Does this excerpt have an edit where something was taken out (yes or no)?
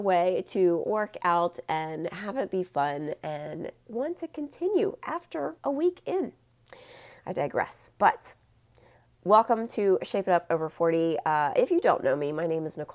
yes